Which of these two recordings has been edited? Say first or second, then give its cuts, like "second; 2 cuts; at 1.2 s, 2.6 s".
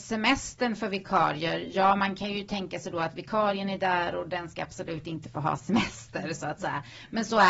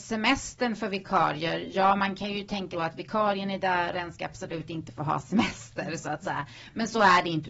second; 2 cuts; at 2.7 s, 3.9 s